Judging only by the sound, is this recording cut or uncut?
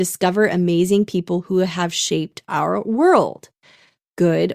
uncut